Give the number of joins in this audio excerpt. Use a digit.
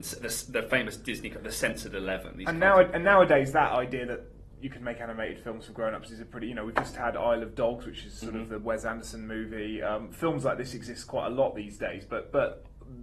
0